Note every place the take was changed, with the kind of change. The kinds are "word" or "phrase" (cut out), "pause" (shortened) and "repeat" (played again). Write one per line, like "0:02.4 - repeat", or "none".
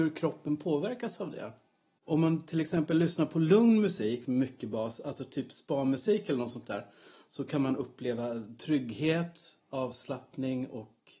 none

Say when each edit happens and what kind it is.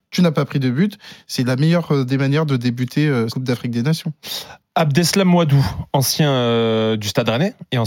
0:03.3 - word

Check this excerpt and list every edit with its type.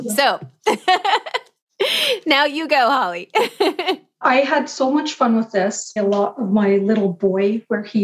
0:06.0 - phrase

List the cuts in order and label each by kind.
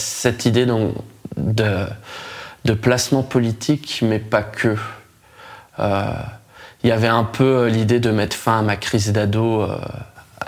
none

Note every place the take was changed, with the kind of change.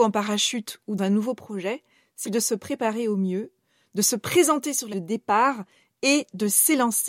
0:01.0 - word
0:02.2 - word
0:04.9 - word

